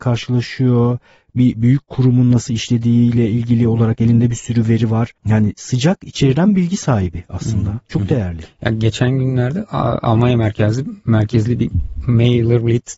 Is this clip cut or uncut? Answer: cut